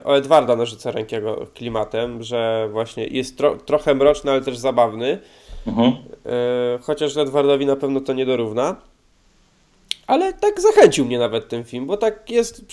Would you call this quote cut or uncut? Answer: uncut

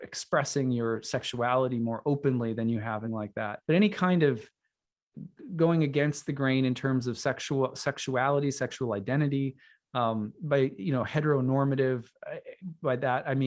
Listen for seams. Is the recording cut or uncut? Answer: cut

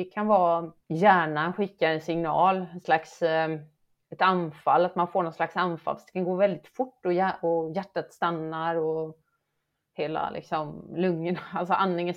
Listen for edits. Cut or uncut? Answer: uncut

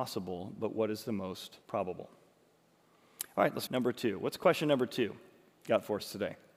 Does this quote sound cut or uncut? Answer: cut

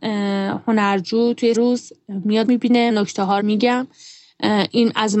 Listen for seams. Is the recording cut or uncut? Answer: cut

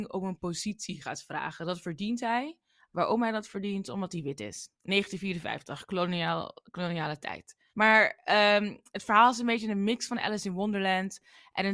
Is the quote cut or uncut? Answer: cut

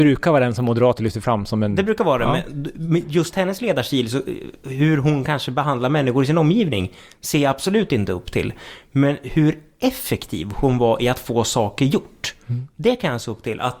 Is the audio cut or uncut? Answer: uncut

